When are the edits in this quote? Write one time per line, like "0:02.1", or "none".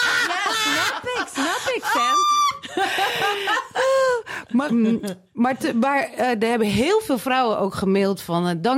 0:04.7